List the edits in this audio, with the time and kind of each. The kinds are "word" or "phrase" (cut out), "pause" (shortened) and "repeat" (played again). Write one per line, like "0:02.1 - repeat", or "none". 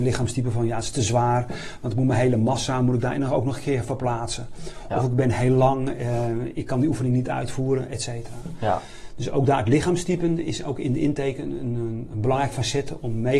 none